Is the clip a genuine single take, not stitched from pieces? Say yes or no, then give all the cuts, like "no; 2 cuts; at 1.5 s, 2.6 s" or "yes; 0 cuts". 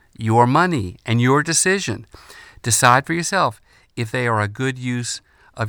yes; 0 cuts